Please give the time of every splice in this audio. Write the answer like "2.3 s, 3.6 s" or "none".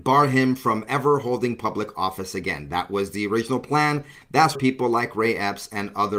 4.5 s